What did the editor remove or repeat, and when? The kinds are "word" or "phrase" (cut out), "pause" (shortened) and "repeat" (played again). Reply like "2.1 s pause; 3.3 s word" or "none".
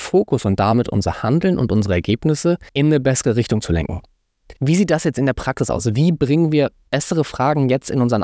2.7 s pause; 4.6 s pause